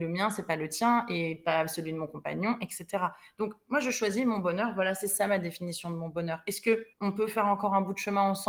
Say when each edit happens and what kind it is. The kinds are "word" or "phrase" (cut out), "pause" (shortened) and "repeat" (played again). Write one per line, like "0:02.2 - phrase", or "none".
0:06.9 - pause